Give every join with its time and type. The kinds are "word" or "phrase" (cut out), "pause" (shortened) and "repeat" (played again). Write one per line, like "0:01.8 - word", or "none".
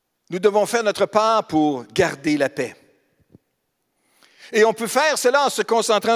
none